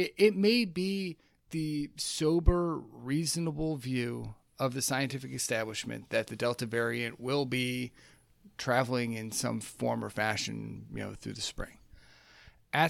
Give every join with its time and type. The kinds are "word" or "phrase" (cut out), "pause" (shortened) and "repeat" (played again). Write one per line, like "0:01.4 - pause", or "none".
none